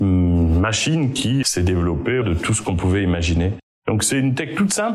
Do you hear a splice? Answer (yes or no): yes